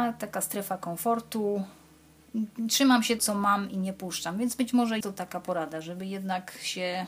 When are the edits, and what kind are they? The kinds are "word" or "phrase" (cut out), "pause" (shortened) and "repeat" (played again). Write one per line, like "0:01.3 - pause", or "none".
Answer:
0:03.2 - word
0:05.0 - word